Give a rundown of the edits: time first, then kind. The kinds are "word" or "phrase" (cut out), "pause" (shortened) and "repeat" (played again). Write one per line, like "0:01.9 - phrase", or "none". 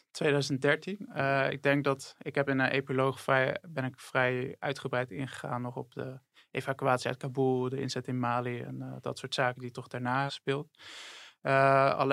0:10.3 - word